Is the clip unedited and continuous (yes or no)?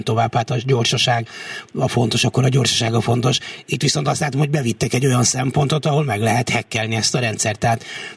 yes